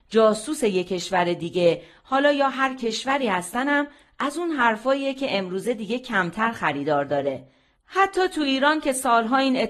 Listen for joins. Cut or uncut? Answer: uncut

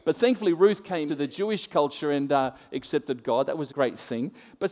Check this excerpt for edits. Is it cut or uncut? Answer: cut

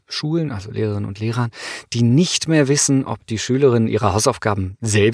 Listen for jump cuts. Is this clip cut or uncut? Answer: uncut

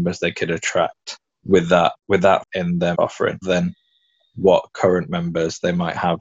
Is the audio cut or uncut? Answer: cut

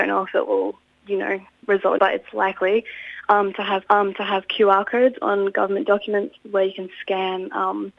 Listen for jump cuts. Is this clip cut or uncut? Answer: cut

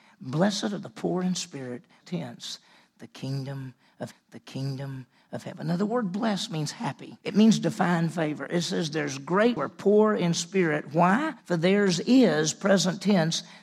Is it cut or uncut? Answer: cut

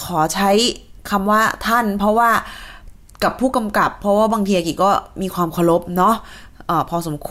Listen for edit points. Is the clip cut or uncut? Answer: uncut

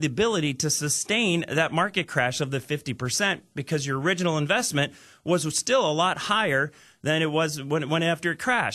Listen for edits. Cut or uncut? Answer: uncut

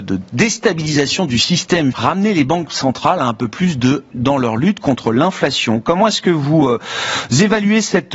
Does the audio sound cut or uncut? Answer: cut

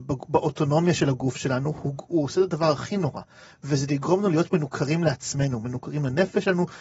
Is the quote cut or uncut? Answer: uncut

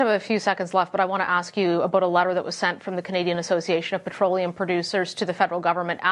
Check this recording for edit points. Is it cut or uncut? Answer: uncut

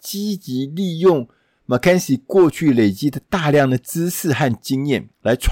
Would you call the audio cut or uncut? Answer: uncut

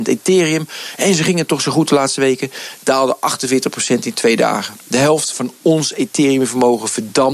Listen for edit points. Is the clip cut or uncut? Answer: uncut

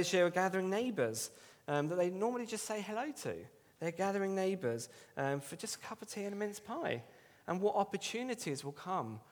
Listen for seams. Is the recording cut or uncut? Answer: uncut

